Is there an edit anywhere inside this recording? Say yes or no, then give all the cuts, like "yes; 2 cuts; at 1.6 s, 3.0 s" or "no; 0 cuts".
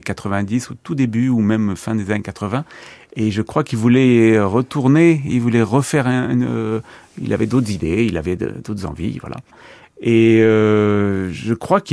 no; 0 cuts